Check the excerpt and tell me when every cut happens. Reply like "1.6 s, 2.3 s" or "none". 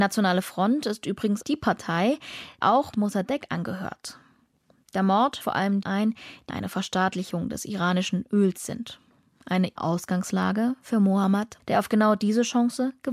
1.4 s, 2.6 s, 2.9 s, 5.4 s, 5.8 s, 6.5 s, 9.8 s, 11.6 s

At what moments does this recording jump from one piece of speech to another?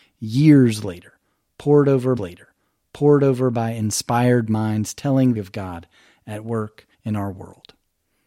2.2 s, 5.4 s, 6.9 s

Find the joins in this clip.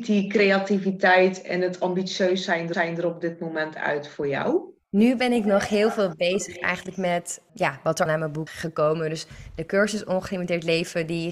2.7 s, 4.8 s, 7.5 s, 8.1 s, 8.5 s

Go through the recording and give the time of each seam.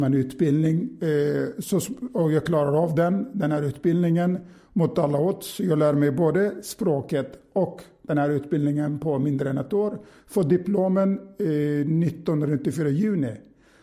none

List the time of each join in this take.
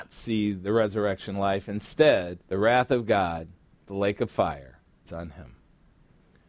2.4 s, 5.1 s

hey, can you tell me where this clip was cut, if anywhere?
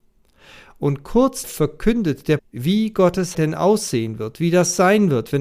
1.4 s, 2.4 s, 3.3 s

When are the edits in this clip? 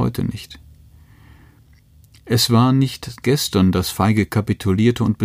3.2 s

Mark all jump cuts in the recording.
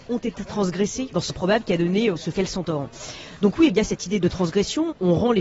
1.3 s, 2.3 s, 3.7 s

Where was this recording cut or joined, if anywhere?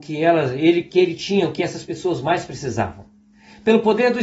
none

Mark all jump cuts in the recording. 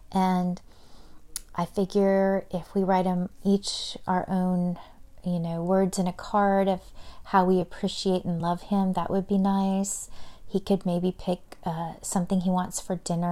none

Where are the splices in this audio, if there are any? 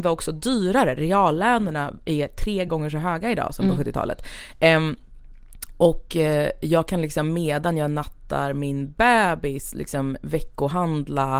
none

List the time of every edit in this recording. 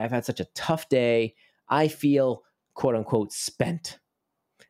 none

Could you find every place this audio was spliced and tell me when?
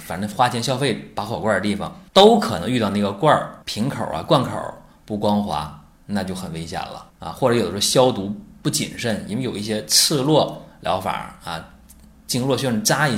2.1 s, 3.6 s, 7.1 s

